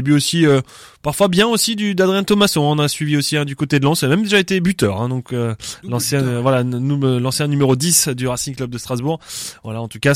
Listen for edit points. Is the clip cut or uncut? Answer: uncut